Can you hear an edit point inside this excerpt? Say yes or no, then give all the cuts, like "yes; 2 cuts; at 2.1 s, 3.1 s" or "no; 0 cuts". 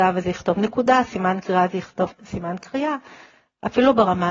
no; 0 cuts